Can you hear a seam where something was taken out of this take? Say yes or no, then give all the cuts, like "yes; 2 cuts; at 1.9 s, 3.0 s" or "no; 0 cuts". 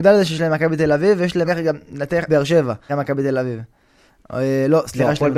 yes; 3 cuts; at 1.5 s, 2.3 s, 2.9 s